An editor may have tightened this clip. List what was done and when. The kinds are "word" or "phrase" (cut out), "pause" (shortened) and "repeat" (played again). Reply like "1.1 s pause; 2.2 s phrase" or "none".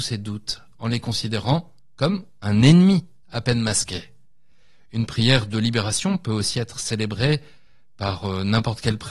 none